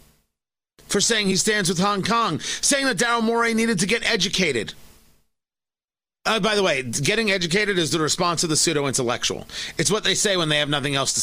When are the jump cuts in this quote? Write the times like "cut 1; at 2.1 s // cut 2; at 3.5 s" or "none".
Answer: none